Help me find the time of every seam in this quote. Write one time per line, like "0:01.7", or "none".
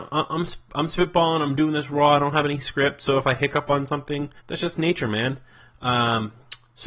0:04.4